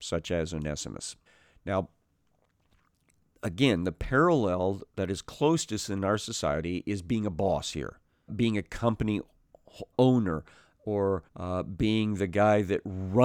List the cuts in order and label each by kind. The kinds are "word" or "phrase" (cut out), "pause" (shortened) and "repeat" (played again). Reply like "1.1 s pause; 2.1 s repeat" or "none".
1.3 s pause; 4.9 s pause; 8.3 s word; 9.9 s word; 11.3 s pause